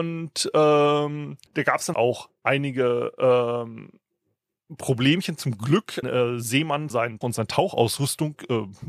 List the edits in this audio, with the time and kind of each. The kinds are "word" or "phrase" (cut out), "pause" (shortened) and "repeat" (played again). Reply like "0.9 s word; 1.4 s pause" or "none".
1.5 s pause; 1.9 s word; 6.0 s phrase; 6.9 s word; 7.2 s word